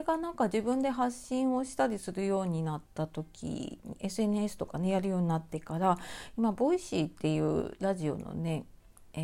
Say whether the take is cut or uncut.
cut